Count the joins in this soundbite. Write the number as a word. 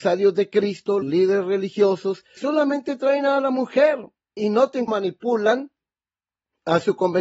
four